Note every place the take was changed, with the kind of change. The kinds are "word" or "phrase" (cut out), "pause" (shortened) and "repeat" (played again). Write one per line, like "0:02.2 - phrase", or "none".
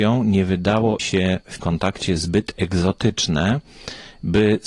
0:01.0 - word
0:01.6 - word